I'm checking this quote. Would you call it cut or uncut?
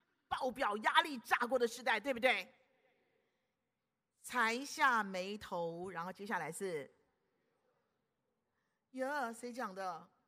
uncut